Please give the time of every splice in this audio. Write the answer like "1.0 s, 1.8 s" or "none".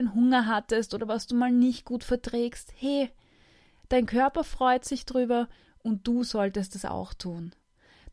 none